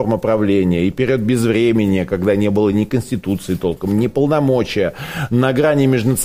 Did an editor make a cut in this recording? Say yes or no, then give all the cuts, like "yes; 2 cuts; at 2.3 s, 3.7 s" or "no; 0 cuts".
no; 0 cuts